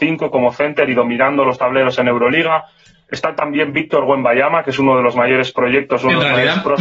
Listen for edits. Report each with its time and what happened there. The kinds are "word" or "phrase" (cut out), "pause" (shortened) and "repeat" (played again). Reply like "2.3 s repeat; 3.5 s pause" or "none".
none